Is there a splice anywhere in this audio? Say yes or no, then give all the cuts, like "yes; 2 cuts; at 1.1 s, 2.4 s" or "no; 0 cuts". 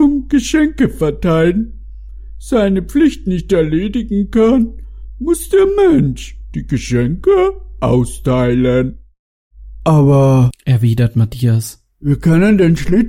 no; 0 cuts